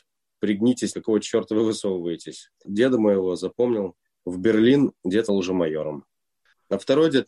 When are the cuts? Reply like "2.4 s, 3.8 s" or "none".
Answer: 0.9 s, 2.5 s, 4.0 s, 5.3 s